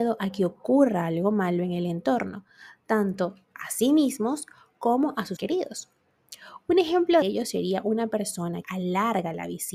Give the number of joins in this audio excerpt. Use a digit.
3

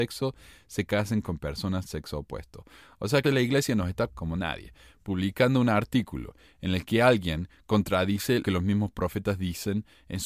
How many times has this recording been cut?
4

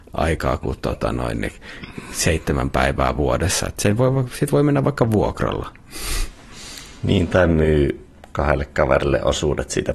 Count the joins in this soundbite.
0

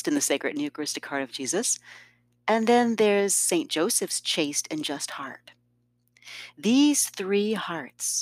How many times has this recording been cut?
0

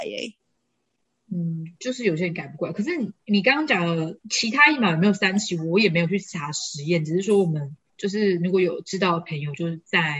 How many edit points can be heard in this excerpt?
2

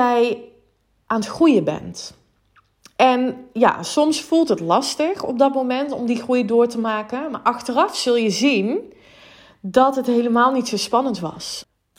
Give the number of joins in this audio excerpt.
0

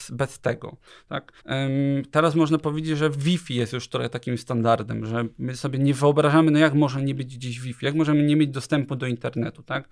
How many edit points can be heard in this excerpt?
1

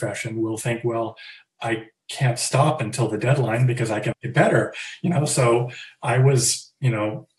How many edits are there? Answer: 1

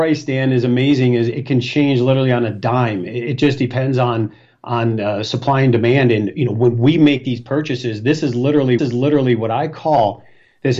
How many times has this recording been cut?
1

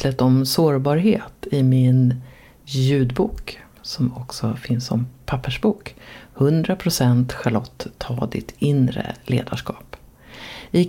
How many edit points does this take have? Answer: 0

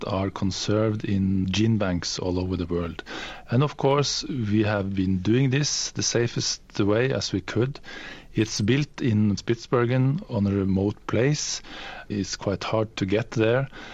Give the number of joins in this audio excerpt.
2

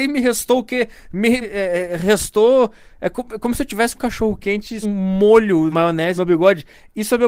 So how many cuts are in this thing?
5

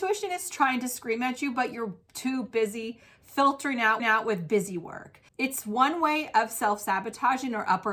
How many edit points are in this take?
2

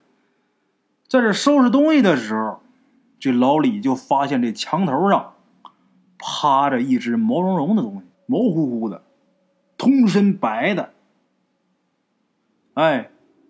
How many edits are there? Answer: 1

